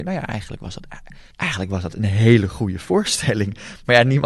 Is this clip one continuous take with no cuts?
no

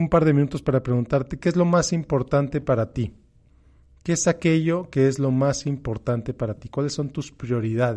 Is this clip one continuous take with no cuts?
yes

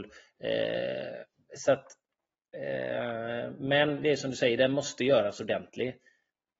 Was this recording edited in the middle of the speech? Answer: no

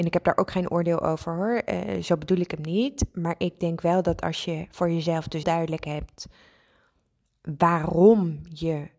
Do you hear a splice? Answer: yes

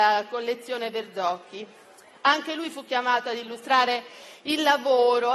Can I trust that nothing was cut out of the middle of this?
yes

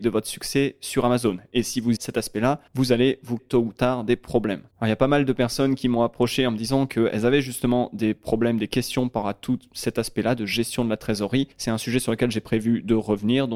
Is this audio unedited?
no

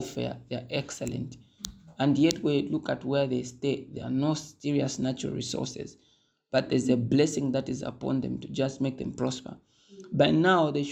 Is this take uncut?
yes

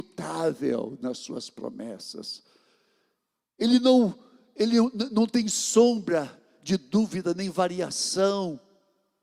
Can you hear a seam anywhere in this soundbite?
no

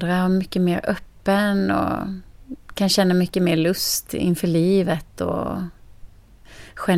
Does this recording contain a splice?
no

